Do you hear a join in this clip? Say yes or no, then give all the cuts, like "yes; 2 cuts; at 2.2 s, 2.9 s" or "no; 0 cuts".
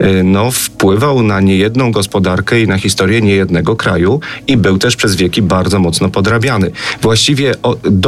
no; 0 cuts